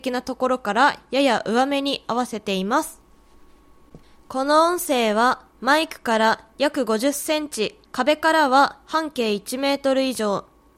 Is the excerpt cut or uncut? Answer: cut